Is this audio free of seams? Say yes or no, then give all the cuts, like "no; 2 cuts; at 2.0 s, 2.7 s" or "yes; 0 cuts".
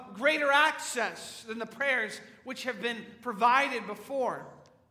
yes; 0 cuts